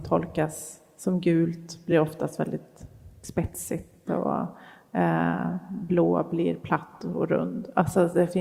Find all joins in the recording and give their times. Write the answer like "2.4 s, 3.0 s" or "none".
none